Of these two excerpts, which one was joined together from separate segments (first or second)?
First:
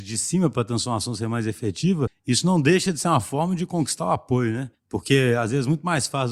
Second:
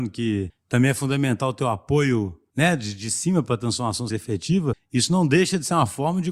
second